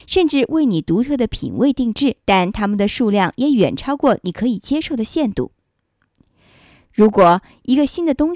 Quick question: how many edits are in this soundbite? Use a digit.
1